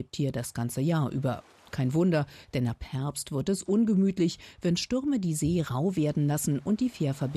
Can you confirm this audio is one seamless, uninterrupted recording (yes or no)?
yes